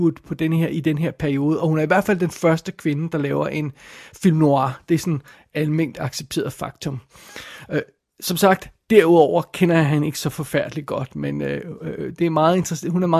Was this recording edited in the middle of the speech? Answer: no; 0 cuts

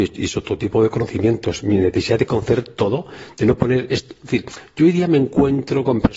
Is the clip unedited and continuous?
yes; 0 cuts

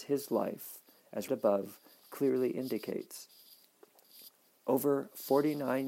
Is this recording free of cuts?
no; 1 cut; at 1.3 s

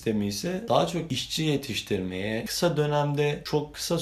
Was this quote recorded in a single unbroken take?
yes; 0 cuts

